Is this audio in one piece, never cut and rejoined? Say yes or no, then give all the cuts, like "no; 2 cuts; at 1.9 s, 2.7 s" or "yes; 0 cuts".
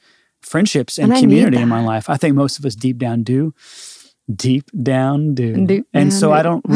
yes; 0 cuts